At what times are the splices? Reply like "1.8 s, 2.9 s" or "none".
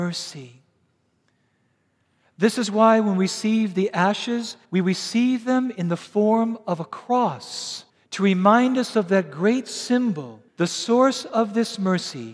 4.6 s, 7.9 s, 10.5 s